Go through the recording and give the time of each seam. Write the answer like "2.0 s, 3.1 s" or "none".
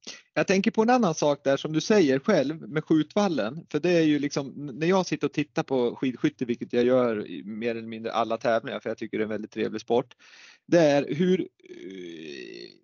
none